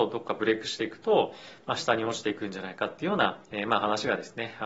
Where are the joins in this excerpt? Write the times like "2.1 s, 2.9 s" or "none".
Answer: 3.4 s